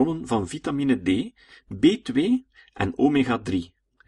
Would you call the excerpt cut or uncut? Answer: uncut